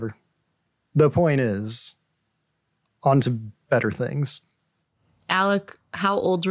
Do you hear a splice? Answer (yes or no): no